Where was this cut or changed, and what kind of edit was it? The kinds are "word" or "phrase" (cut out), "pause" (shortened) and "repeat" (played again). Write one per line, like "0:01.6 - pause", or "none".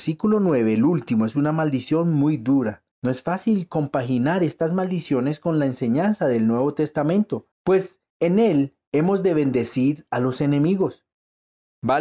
0:02.9 - pause
0:07.5 - pause